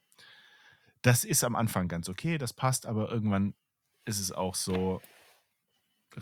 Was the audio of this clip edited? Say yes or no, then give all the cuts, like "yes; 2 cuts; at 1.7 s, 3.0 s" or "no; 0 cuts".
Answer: no; 0 cuts